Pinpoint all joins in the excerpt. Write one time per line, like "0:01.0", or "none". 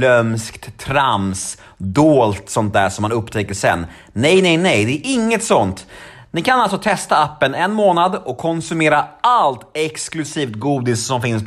none